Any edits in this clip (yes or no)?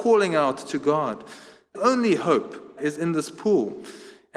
yes